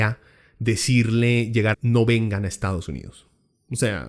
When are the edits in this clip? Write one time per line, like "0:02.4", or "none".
0:01.7